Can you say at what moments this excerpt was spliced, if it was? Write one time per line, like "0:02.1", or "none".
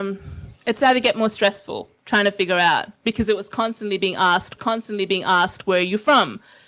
0:02.0
0:04.6